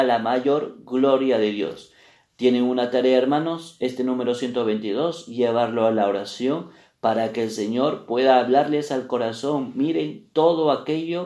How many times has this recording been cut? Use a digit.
0